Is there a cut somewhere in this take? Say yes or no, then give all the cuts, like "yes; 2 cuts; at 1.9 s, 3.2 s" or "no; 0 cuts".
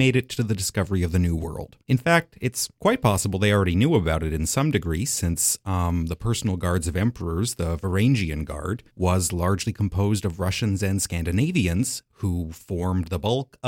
yes; 3 cuts; at 1.8 s, 2.7 s, 8.9 s